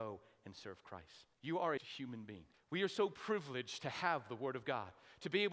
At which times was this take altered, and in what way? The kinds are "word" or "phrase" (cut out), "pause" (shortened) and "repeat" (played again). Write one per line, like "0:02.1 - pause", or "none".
0:01.3 - pause
0:01.8 - phrase
0:02.5 - pause